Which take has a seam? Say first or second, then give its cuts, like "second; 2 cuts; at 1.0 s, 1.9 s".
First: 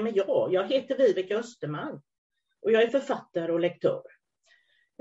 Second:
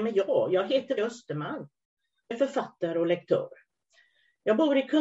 second; 2 cuts; at 1.0 s, 2.3 s